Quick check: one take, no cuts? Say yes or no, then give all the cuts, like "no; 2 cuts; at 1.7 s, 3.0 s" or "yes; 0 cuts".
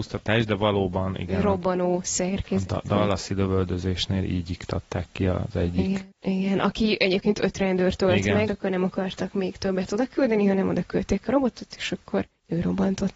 no; 1 cut; at 8.5 s